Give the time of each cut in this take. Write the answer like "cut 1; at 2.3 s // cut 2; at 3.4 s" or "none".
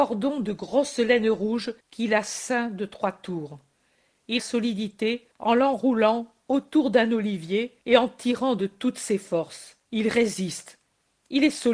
cut 1; at 1.8 s // cut 2; at 4.4 s // cut 3; at 5.3 s // cut 4; at 7.8 s // cut 5; at 9.8 s